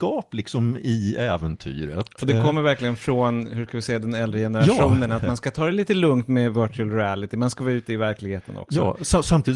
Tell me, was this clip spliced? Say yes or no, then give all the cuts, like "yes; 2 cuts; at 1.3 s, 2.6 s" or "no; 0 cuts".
no; 0 cuts